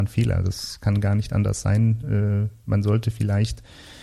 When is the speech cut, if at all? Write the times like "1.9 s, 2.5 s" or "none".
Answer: none